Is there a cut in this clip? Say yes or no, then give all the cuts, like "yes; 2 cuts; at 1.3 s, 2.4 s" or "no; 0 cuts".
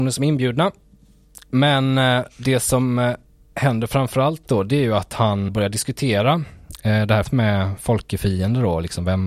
yes; 2 cuts; at 5.5 s, 7.2 s